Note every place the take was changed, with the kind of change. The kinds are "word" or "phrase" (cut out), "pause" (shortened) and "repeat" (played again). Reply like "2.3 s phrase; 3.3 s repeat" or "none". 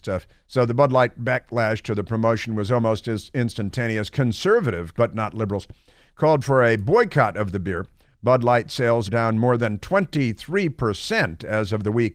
4.9 s word; 9.1 s word